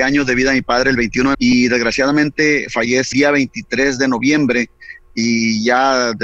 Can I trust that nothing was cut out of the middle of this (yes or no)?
no